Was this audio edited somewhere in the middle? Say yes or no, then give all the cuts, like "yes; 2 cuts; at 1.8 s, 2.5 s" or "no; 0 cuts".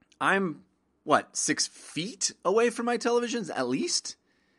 no; 0 cuts